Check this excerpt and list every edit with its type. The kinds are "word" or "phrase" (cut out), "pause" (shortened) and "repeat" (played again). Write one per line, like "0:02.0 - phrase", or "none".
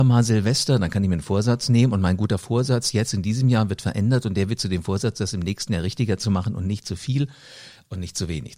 none